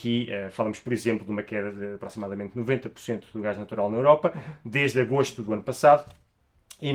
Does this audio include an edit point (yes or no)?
no